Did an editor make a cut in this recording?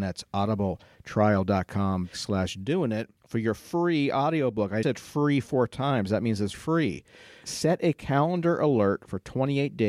yes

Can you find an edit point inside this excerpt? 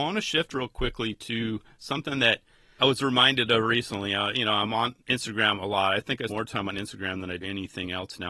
yes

